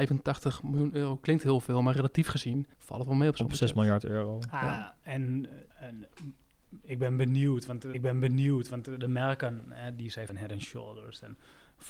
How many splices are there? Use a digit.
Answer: 4